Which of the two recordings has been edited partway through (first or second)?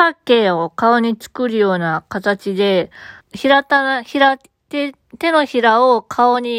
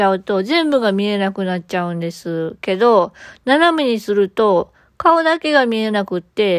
first